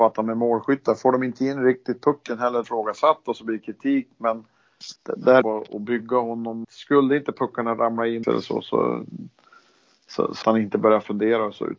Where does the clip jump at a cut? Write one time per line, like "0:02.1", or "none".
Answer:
0:02.6
0:05.0
0:05.4
0:06.6
0:08.2
0:10.4